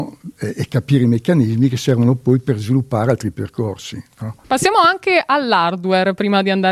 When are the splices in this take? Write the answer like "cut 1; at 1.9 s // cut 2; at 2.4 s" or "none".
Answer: cut 1; at 4.4 s